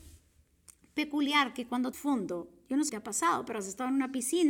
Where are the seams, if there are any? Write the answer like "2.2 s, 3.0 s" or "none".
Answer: 1.9 s, 2.9 s